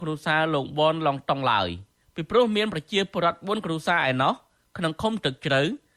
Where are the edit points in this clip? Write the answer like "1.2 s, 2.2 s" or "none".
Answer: none